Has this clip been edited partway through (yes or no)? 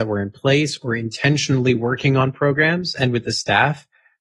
no